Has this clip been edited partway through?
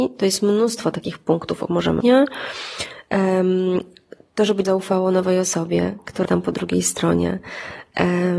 yes; 4 cuts; at 1.7 s, 2.0 s, 4.6 s, 6.2 s

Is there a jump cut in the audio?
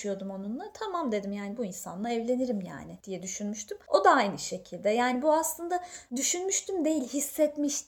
no; 0 cuts

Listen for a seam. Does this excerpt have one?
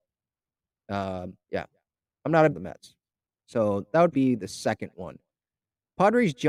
yes; 4 cuts; at 1.4 s, 2.5 s, 3.3 s, 4.1 s

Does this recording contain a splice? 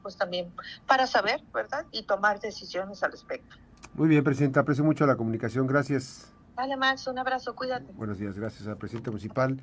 yes; 2 cuts; at 1.9 s, 6.4 s

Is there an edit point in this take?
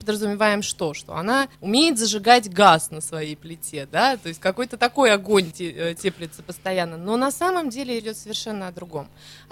yes; 3 cuts; at 1.5 s, 5.5 s, 8.0 s

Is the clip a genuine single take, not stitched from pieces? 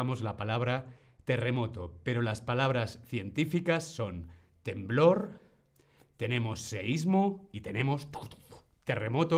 yes; 0 cuts

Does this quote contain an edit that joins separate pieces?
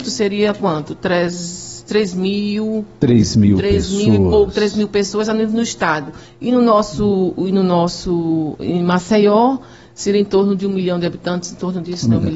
no; 0 cuts

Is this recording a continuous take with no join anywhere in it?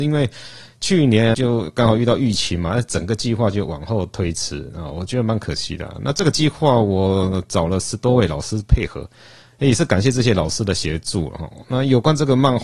no; 1 cut; at 1.3 s

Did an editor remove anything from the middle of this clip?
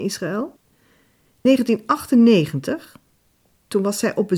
yes; 1 cut; at 1.5 s

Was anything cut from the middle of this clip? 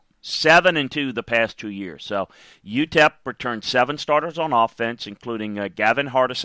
no; 0 cuts

